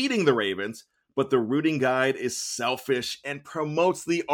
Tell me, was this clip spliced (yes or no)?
no